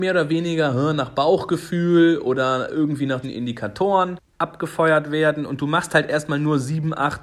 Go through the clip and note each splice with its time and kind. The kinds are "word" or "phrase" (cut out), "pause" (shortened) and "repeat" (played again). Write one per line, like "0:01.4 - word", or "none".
0:03.2 - phrase